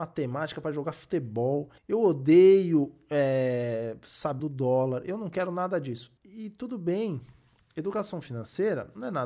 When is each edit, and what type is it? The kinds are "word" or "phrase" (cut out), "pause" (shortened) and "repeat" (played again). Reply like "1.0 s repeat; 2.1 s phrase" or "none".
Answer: 1.8 s pause; 4.4 s phrase; 6.2 s pause

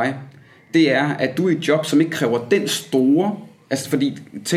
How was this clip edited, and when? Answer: none

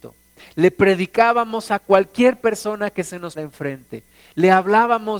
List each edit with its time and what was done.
3.3 s word

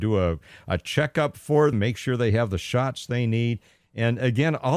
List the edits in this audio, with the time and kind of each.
1.7 s word

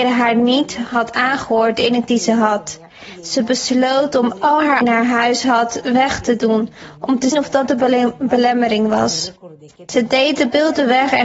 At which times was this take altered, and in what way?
2.1 s word; 4.8 s phrase; 7.3 s word

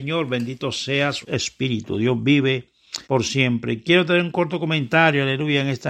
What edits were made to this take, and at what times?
1.2 s word; 3.0 s pause

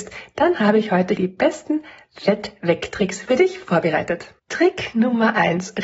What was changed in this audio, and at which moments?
1.2 s word; 4.4 s pause

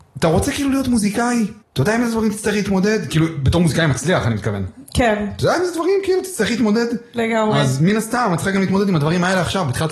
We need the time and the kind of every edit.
1.6 s pause

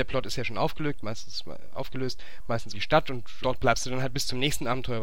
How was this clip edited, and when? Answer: 2.7 s phrase; 3.4 s word

